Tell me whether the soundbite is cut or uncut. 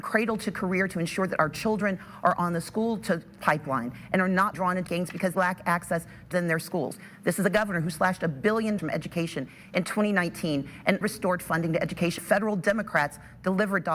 cut